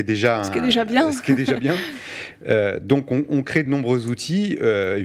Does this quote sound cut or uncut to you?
uncut